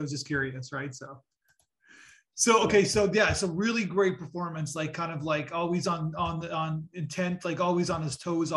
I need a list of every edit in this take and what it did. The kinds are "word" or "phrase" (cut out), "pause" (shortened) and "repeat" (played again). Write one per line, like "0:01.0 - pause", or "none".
none